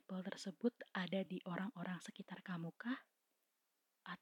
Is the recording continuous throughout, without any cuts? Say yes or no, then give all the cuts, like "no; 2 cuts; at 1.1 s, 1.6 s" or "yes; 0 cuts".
yes; 0 cuts